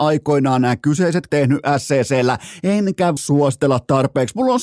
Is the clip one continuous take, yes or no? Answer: no